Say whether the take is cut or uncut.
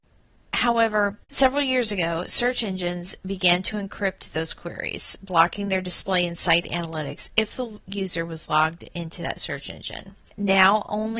cut